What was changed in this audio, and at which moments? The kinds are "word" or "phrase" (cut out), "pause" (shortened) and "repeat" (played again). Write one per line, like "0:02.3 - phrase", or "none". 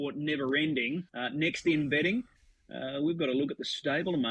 0:01.1 - pause